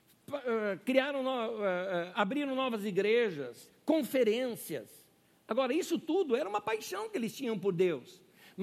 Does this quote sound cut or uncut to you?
uncut